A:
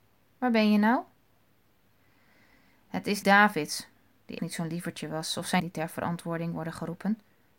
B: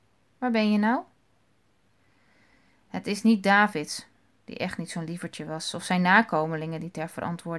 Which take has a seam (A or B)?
A